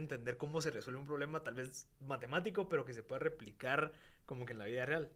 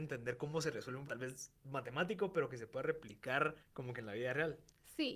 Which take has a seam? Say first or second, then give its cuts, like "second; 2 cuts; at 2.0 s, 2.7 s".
second; 2 cuts; at 1.1 s, 3.6 s